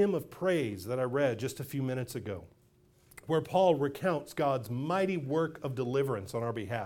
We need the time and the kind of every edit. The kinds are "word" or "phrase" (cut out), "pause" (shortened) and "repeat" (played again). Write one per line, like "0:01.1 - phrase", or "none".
none